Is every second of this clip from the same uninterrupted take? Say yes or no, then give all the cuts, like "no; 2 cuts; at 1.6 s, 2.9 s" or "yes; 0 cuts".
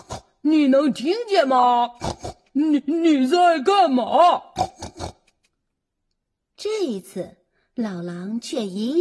yes; 0 cuts